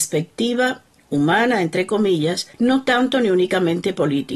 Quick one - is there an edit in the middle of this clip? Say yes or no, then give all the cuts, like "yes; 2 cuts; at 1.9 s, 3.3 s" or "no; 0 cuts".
yes; 1 cut; at 2.5 s